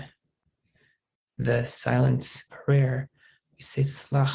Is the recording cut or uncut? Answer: cut